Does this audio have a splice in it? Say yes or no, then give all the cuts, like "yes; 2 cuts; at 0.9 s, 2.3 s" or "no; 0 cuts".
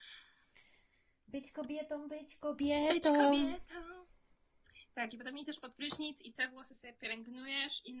no; 0 cuts